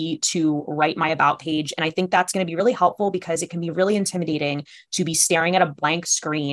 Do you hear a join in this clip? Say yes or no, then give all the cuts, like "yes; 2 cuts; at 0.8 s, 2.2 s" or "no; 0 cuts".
no; 0 cuts